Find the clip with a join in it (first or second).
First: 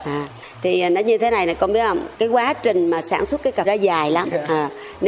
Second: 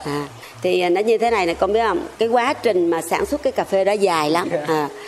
first